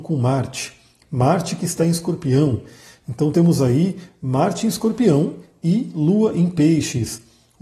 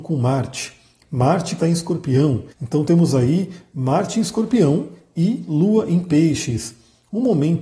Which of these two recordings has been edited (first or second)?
second